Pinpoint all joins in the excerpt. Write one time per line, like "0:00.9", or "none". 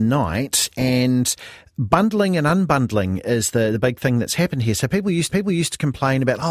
0:05.3